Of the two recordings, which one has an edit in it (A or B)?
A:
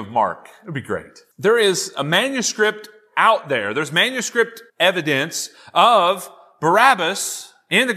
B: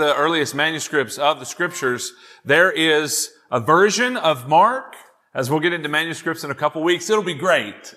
A